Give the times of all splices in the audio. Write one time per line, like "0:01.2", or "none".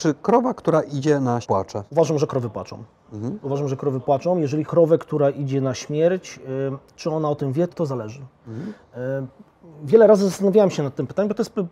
0:01.4
0:01.9
0:04.7
0:07.7